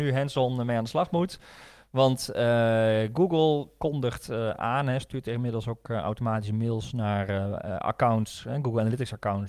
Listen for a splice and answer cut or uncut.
uncut